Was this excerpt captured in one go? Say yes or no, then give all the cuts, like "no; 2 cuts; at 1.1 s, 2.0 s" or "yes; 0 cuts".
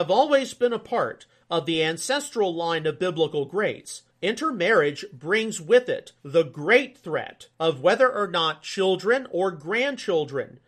no; 3 cuts; at 4.1 s, 6.2 s, 7.5 s